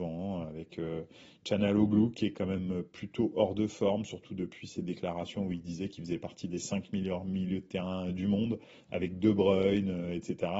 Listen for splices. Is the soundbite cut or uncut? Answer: uncut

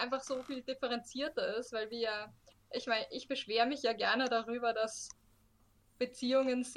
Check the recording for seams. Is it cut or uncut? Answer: uncut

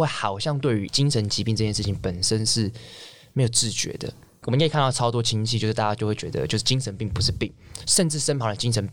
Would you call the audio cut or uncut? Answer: uncut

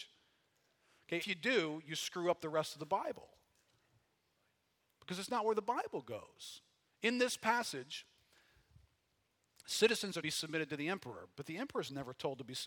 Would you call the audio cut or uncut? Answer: cut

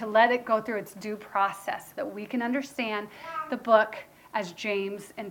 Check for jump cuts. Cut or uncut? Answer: uncut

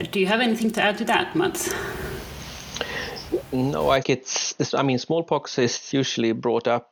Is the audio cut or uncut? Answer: cut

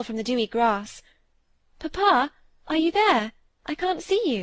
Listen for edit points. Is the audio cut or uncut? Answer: uncut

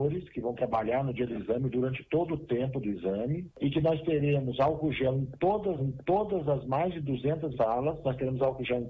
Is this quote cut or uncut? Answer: cut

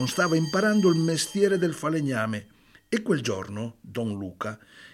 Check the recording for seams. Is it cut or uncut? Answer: uncut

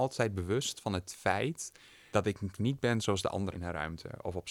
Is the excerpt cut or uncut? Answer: cut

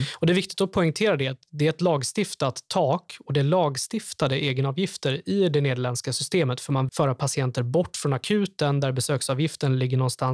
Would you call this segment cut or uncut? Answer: cut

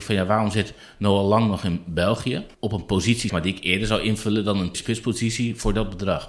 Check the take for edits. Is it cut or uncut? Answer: cut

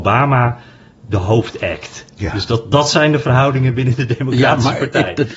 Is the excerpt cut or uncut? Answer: uncut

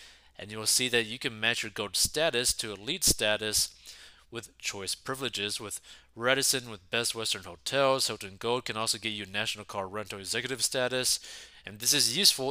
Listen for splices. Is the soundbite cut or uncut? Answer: uncut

